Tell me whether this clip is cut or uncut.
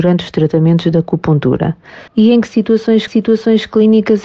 cut